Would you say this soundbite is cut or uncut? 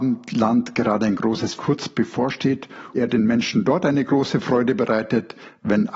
cut